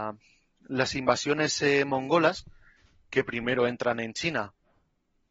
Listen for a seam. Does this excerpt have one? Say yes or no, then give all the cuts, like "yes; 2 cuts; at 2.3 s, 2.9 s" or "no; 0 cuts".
no; 0 cuts